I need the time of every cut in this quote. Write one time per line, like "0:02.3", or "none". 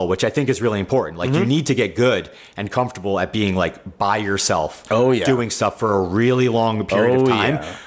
none